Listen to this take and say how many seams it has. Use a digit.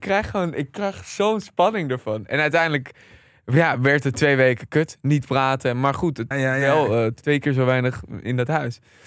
1